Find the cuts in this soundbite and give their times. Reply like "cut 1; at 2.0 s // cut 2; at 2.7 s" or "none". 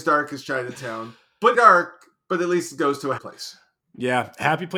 cut 1; at 1.5 s // cut 2; at 3.2 s